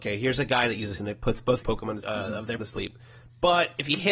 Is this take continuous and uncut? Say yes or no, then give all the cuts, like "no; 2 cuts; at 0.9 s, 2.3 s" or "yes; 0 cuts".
no; 4 cuts; at 1.0 s, 1.6 s, 2.0 s, 2.6 s